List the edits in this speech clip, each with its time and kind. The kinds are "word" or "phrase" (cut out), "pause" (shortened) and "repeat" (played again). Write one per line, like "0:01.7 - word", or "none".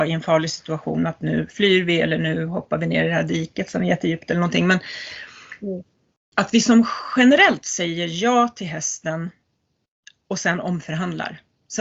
none